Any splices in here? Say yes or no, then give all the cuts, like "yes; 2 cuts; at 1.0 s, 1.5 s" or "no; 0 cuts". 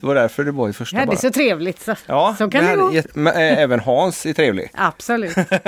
yes; 1 cut; at 3.0 s